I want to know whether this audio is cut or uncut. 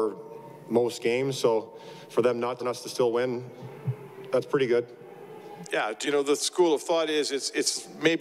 cut